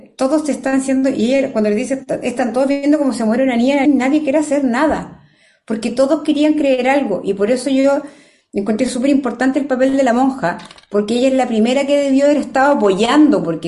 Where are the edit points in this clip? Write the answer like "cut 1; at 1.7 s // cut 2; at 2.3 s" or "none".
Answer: cut 1; at 3.8 s